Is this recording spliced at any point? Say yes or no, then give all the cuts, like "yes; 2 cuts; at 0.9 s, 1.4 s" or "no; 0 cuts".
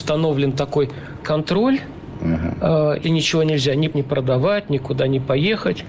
yes; 3 cuts; at 1.2 s, 3.0 s, 3.9 s